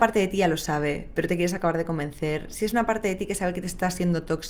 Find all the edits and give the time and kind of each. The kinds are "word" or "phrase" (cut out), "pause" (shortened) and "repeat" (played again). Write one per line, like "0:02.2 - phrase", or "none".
none